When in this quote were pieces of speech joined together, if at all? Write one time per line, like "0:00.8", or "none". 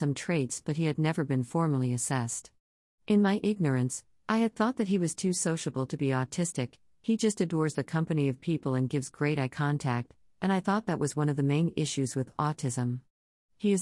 none